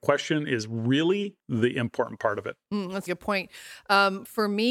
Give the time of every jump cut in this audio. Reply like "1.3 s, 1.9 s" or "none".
1.4 s, 3.1 s

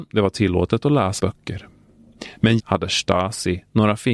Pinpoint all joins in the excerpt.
1.2 s, 2.6 s

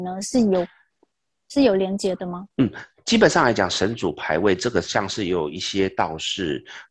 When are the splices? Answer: 2.5 s

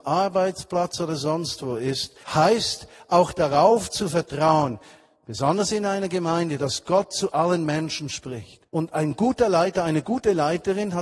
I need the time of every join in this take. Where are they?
2.2 s, 8.7 s

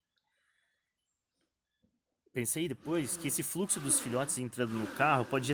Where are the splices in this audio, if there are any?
none

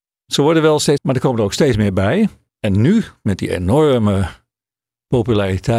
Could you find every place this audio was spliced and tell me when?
1.0 s

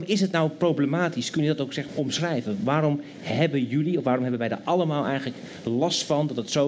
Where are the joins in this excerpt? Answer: 1.9 s

